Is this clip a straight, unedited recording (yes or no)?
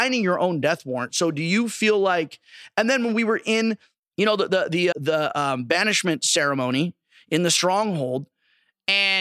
no